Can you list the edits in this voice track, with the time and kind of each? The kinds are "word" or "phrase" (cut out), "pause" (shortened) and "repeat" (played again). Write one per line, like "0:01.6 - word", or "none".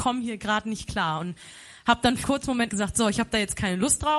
0:02.2 - word
0:02.7 - word